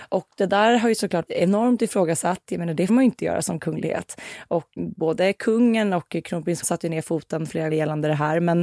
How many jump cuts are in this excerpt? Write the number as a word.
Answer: five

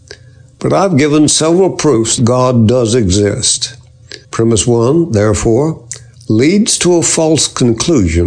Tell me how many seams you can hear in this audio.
two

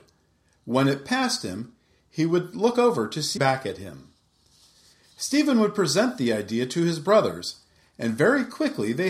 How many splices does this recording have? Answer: one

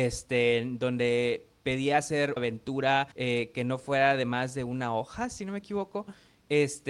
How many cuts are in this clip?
two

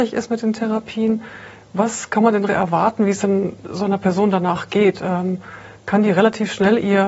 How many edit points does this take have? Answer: one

